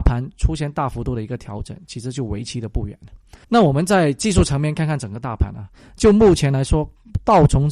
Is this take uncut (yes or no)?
no